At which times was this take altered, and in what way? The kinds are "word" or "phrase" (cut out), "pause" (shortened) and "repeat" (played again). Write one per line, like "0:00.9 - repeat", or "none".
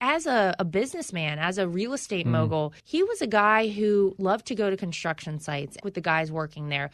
0:02.8 - pause
0:05.8 - phrase